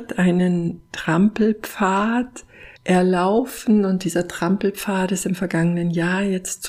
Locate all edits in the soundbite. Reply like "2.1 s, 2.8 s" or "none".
2.8 s